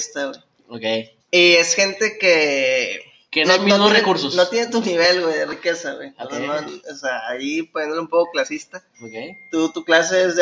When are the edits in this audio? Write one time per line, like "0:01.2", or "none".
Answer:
0:01.2
0:03.4
0:08.9